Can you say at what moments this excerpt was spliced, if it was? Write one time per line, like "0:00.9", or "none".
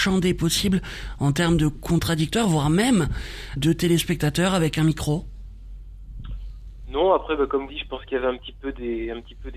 0:03.6
0:07.7